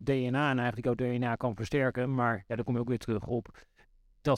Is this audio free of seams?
yes; 0 cuts

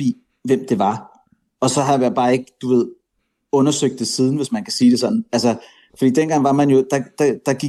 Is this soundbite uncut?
yes; 0 cuts

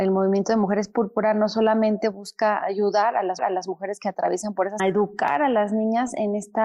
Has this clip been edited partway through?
yes; 2 cuts; at 3.4 s, 4.8 s

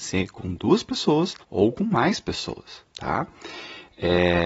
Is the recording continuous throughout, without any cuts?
no; 1 cut; at 1.4 s

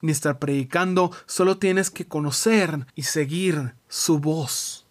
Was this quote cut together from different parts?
yes; 2 cuts; at 2.9 s, 3.8 s

